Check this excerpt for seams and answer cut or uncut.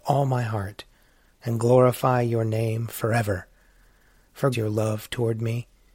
cut